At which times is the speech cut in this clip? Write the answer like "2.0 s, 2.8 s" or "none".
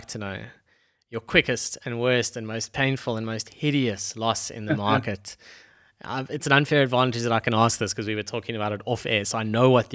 none